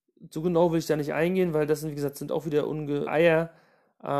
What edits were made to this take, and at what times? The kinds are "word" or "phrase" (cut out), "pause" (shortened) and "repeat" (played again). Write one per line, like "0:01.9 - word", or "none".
0:03.1 - word